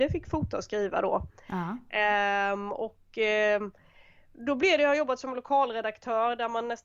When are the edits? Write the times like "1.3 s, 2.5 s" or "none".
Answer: none